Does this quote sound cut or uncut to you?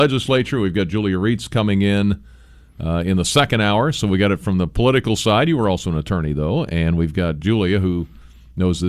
uncut